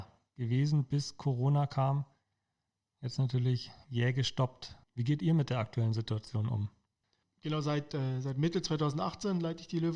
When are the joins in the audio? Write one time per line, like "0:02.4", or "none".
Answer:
0:04.8